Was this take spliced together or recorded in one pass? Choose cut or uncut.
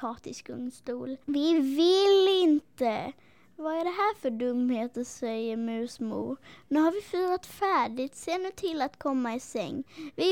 cut